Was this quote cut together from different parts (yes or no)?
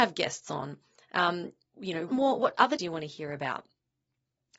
yes